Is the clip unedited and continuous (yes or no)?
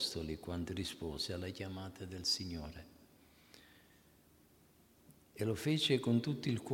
yes